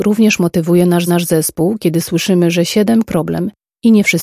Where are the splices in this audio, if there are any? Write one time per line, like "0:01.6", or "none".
0:01.1
0:03.0